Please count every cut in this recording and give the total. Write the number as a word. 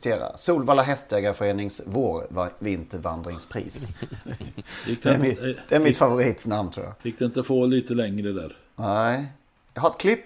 one